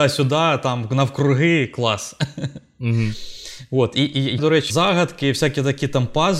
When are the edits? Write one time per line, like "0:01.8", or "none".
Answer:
0:04.4
0:04.7